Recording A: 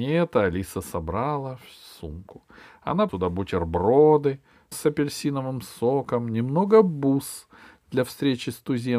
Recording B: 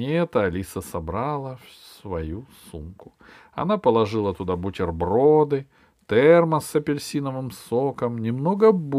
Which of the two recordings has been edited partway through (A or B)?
A